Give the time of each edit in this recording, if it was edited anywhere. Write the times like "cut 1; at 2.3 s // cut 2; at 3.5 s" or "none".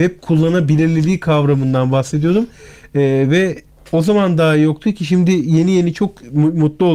none